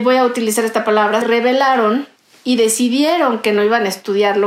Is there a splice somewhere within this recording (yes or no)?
yes